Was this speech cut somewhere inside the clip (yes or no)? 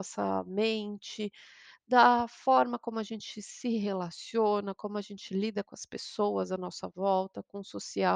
no